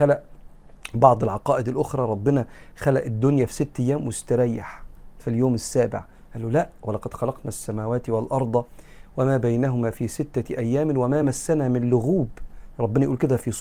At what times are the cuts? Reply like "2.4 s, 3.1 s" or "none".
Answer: none